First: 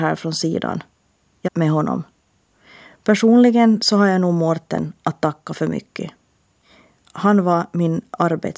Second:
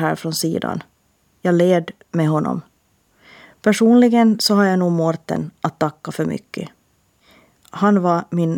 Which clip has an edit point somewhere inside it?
first; 1 cut; at 1.5 s

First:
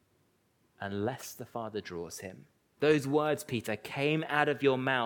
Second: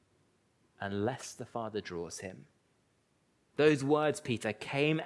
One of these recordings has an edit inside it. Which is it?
first; 1 cut; at 2.6 s

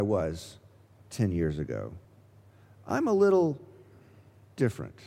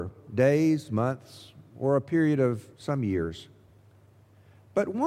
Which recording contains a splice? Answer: second; 1 cut; at 2.7 s

